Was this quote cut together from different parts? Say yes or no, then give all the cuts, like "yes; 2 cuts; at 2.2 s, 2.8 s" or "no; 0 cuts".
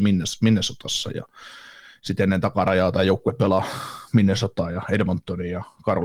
no; 0 cuts